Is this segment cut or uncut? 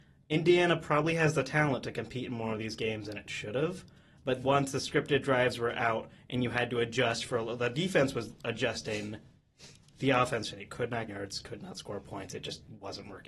cut